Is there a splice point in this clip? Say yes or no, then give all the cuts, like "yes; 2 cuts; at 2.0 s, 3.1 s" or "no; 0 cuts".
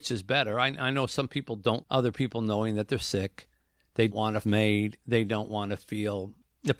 yes; 3 cuts; at 1.8 s, 4.1 s, 4.4 s